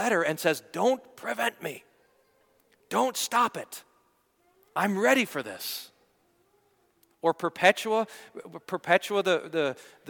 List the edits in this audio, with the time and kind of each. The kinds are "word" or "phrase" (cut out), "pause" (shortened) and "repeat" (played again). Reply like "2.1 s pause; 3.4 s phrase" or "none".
none